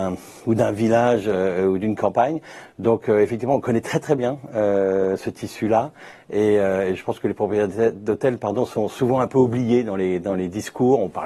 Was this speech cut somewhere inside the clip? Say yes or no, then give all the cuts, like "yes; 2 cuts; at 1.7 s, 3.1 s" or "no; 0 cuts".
no; 0 cuts